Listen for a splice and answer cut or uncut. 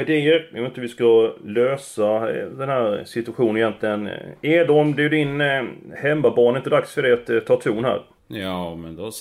uncut